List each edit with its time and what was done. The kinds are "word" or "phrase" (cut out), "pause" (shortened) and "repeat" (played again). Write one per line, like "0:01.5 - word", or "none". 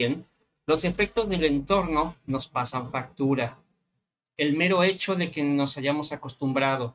none